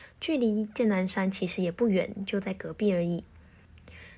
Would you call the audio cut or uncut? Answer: uncut